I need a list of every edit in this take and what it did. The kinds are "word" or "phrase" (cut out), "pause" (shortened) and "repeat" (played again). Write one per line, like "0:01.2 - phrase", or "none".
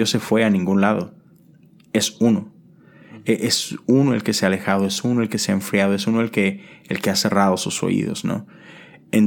none